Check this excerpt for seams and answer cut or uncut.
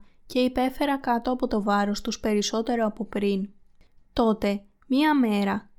uncut